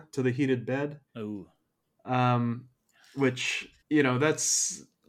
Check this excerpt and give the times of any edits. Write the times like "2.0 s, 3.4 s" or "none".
1.1 s, 3.8 s